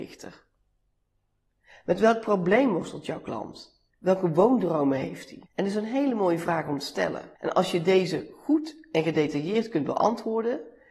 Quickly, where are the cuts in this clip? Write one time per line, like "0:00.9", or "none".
0:03.9
0:05.5
0:07.4